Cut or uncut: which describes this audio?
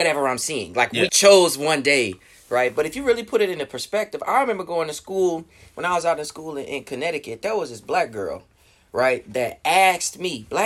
cut